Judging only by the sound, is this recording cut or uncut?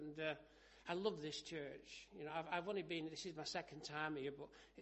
uncut